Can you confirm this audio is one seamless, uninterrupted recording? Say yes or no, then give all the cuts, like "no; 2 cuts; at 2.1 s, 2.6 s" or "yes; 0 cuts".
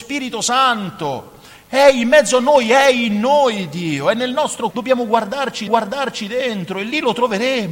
no; 2 cuts; at 4.7 s, 5.7 s